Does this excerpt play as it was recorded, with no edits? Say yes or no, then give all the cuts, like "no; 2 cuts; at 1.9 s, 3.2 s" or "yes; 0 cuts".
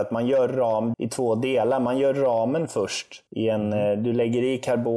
no; 2 cuts; at 0.9 s, 3.3 s